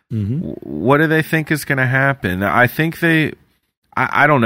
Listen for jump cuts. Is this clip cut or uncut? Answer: uncut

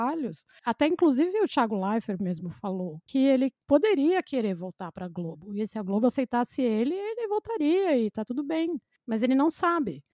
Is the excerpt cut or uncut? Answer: uncut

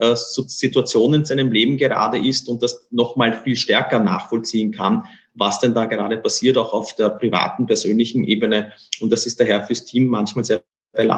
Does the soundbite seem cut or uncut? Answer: uncut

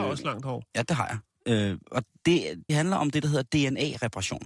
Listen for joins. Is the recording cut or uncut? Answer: cut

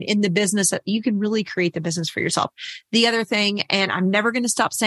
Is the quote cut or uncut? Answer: uncut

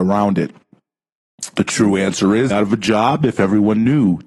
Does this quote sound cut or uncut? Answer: cut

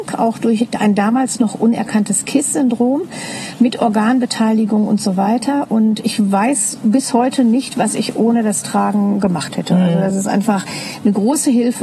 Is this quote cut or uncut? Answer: uncut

